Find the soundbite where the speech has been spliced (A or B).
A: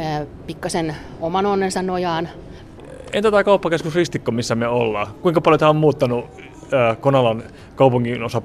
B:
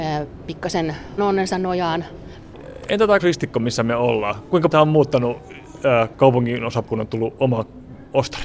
B